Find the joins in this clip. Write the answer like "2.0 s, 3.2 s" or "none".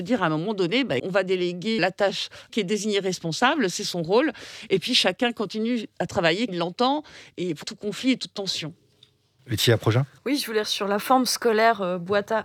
1.0 s, 1.8 s, 2.5 s, 6.5 s, 7.6 s, 10.6 s